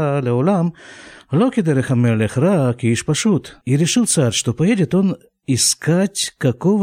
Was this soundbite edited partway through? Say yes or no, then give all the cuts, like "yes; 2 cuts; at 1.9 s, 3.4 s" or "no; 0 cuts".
yes; 1 cut; at 3.6 s